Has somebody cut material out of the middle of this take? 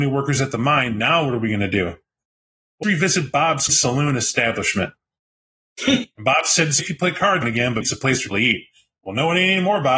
yes; 6 cuts; at 2.8 s, 3.7 s, 6.8 s, 7.4 s, 7.8 s, 8.3 s

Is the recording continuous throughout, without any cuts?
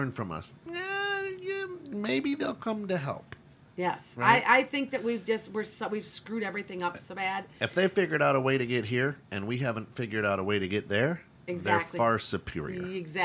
yes; 0 cuts

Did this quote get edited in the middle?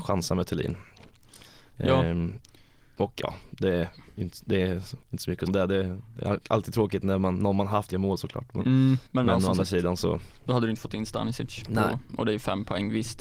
yes; 4 cuts; at 5.0 s, 5.5 s, 7.9 s, 9.1 s

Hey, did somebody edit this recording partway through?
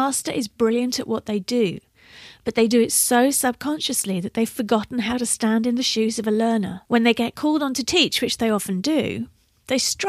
yes; 1 cut; at 6.8 s

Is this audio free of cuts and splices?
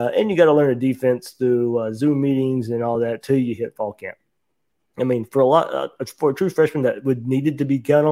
yes; 0 cuts

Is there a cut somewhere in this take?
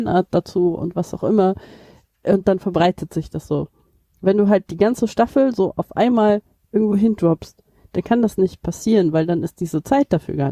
no; 0 cuts

